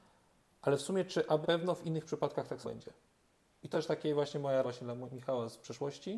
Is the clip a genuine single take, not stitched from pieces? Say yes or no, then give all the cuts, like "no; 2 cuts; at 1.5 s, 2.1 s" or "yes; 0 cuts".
no; 4 cuts; at 1.4 s, 2.6 s, 3.7 s, 4.6 s